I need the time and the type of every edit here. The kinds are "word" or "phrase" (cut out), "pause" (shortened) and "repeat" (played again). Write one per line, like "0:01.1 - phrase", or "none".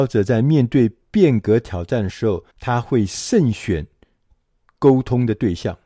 0:02.5 - pause